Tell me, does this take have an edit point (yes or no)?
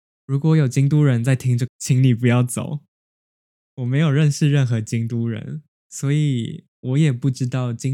yes